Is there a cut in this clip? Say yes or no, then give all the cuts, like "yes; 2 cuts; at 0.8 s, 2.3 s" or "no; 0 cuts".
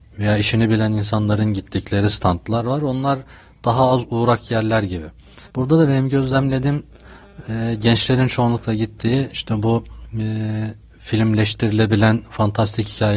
yes; 1 cut; at 5.5 s